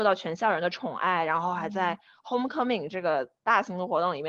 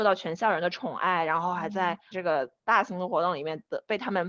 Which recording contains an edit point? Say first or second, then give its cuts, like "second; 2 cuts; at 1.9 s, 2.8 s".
second; 1 cut; at 2.1 s